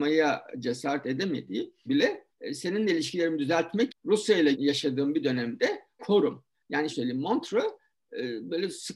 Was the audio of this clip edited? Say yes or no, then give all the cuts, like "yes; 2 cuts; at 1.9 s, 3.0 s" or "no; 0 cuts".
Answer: yes; 6 cuts; at 1.9 s, 2.3 s, 3.9 s, 4.5 s, 6.0 s, 6.9 s